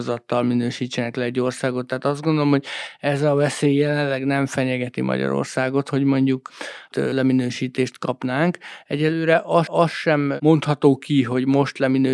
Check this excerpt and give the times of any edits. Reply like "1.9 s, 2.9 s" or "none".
6.9 s, 9.7 s